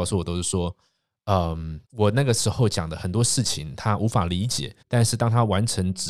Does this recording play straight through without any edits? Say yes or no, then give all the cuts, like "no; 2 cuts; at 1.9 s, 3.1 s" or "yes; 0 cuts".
no; 2 cuts; at 1.9 s, 4.8 s